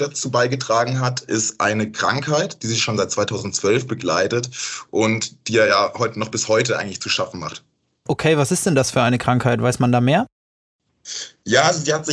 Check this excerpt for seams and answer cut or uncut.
uncut